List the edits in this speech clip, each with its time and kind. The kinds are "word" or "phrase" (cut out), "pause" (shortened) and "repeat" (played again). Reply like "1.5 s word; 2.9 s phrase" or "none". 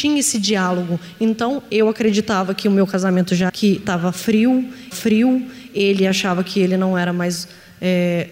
3.5 s word; 4.9 s repeat